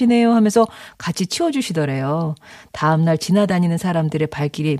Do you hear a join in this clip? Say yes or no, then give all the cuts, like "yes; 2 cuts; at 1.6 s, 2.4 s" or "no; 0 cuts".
no; 0 cuts